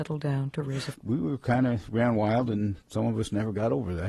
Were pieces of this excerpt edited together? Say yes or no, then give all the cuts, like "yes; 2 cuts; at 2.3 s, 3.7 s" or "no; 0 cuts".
yes; 2 cuts; at 0.9 s, 2.8 s